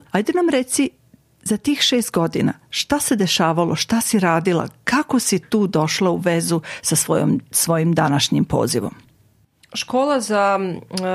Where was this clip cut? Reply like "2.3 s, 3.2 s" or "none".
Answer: none